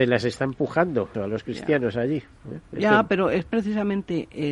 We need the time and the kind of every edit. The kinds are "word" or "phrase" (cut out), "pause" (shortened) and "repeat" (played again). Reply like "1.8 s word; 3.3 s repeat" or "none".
1.1 s word